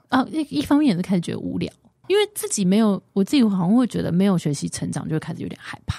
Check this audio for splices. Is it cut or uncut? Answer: cut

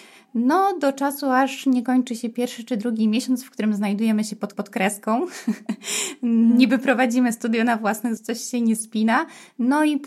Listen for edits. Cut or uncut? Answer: cut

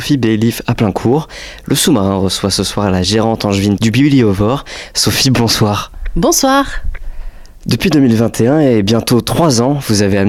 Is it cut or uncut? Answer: uncut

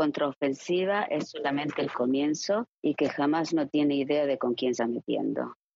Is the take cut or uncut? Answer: cut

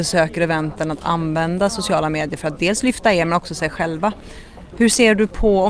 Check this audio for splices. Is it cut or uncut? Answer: uncut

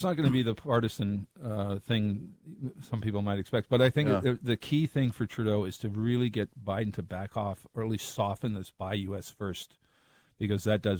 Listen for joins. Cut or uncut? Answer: uncut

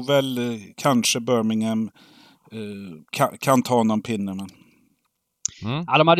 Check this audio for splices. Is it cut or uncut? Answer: cut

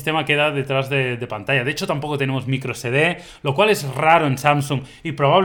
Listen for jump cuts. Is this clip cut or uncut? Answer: uncut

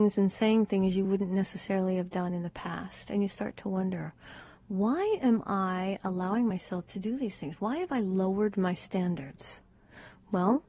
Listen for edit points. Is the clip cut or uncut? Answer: uncut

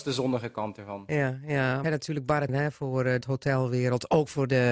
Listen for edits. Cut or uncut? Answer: cut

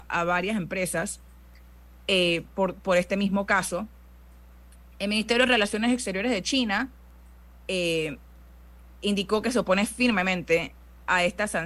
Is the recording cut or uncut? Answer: uncut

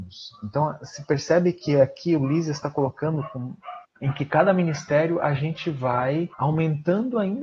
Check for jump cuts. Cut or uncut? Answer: cut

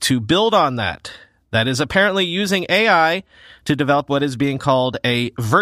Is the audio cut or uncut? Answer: uncut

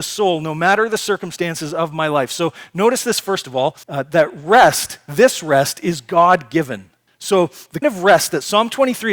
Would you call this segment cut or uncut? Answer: cut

